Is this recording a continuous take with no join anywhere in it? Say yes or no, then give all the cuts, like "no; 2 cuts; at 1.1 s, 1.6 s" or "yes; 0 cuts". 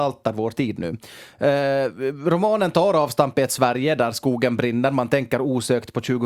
yes; 0 cuts